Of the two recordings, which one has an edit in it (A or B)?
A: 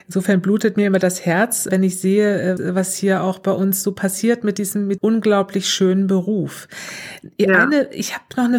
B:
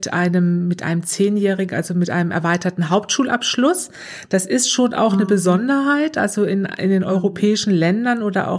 A